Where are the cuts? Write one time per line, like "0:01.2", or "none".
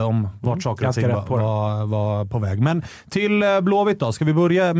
none